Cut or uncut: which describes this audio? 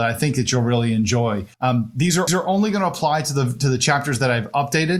cut